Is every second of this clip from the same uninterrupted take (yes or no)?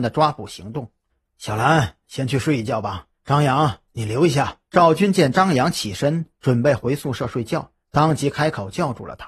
no